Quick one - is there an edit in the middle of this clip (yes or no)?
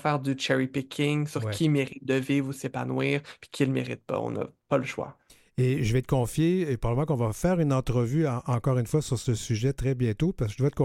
no